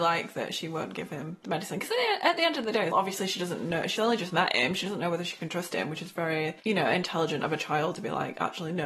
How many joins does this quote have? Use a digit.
3